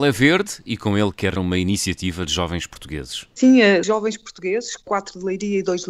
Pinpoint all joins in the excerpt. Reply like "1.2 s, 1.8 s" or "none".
1.4 s, 3.8 s